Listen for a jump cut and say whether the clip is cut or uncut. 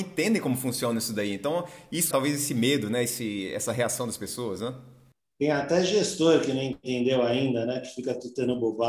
cut